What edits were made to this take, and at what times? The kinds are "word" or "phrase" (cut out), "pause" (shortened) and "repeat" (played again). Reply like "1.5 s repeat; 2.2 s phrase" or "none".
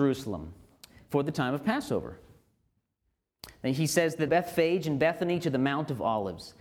4.3 s phrase